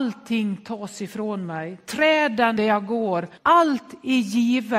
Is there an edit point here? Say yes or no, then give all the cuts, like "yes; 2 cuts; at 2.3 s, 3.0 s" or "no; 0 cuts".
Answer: yes; 2 cuts; at 2.6 s, 3.4 s